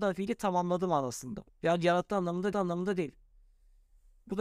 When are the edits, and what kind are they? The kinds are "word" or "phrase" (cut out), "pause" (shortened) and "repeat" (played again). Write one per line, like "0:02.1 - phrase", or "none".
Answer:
0:01.5 - pause
0:02.5 - repeat